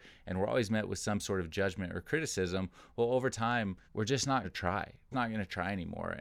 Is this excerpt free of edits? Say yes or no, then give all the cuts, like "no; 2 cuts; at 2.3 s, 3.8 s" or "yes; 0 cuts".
no; 3 cuts; at 3.9 s, 4.4 s, 5.1 s